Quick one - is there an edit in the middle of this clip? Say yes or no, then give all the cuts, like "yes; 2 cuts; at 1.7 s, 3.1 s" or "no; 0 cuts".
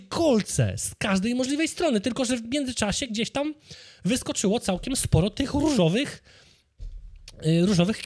no; 0 cuts